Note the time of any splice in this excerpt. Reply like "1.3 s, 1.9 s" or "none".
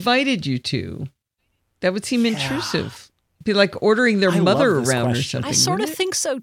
none